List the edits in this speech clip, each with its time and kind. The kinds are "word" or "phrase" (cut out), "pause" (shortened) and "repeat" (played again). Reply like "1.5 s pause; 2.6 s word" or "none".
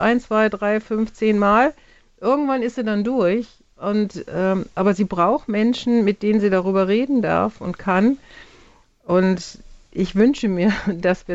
none